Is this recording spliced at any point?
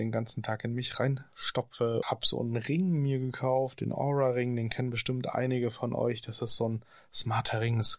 yes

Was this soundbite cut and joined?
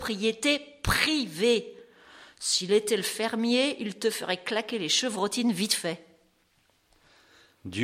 no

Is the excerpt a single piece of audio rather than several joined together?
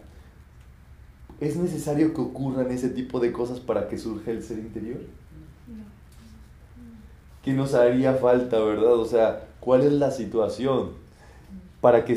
yes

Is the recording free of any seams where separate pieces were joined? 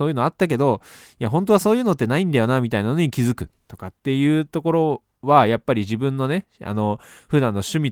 yes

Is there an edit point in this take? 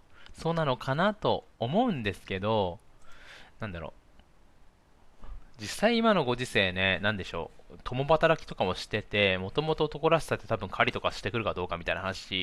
no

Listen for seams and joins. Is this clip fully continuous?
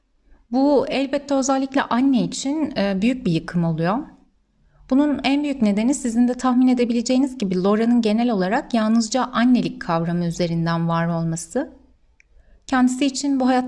yes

